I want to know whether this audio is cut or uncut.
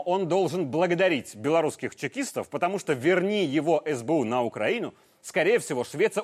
uncut